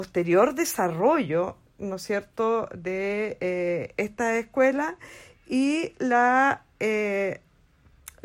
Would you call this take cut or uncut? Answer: uncut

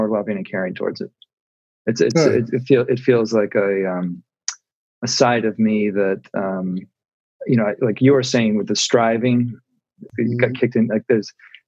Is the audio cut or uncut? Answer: cut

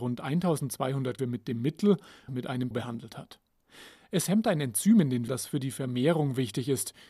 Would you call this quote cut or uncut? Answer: cut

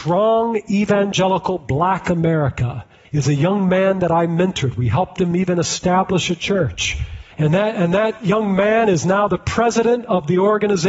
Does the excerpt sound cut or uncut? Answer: cut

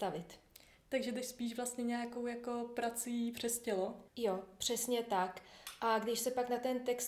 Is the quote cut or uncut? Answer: cut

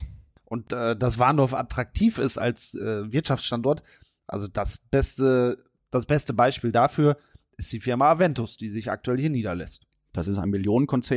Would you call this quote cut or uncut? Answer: uncut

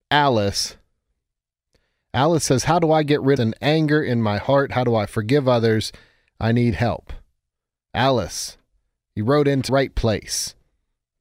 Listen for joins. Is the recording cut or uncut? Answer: cut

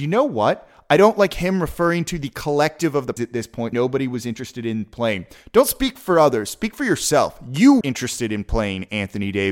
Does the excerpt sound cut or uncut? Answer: cut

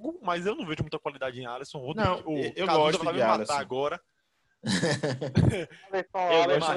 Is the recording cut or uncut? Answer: uncut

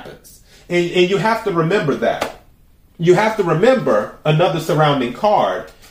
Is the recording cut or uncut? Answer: uncut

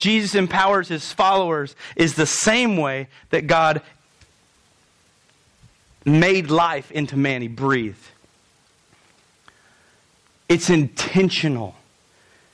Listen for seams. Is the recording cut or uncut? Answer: uncut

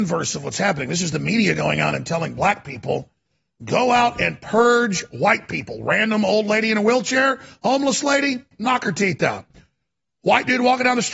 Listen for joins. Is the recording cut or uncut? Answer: uncut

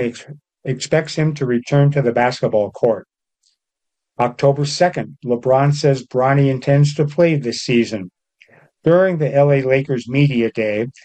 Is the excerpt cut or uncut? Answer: uncut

